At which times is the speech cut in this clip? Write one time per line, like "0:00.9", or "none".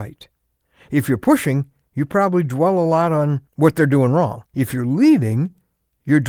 0:03.5
0:04.5